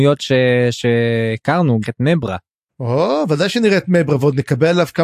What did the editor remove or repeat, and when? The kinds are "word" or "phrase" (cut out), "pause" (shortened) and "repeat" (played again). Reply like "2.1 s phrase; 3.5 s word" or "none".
1.8 s phrase